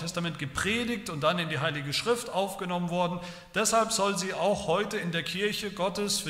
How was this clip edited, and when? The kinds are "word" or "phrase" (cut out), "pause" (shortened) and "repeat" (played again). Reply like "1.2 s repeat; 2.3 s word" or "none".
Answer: none